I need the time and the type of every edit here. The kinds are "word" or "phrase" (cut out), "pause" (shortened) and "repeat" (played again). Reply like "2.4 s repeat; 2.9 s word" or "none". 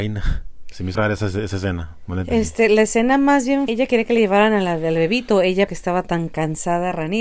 1.0 s word; 3.7 s word; 5.7 s word